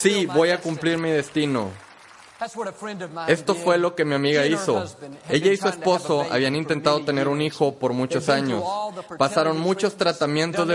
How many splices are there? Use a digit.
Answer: 0